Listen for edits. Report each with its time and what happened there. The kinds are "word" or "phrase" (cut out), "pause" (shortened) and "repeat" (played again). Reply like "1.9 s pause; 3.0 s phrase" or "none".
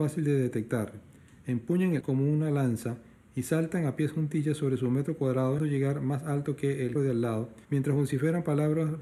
2.0 s word; 5.6 s word; 7.0 s word; 7.6 s pause